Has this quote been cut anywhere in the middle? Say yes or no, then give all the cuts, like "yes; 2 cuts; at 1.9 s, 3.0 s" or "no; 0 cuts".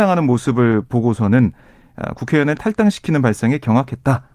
no; 0 cuts